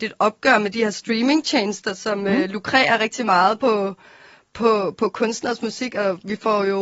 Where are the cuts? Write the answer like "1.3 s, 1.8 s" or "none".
none